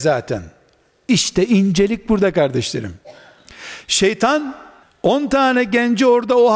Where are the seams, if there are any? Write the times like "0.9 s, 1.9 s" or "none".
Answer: 4.8 s